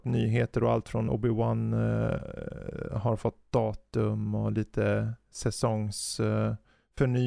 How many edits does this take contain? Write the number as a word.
one